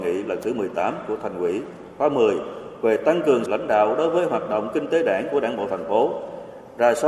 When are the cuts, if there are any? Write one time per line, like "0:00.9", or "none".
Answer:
0:03.5